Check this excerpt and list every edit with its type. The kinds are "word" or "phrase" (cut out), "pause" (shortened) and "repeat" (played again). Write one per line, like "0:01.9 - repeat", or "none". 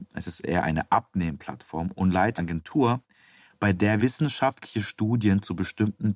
0:02.4 - word
0:04.0 - word